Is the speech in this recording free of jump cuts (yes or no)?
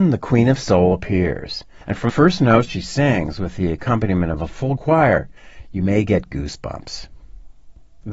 no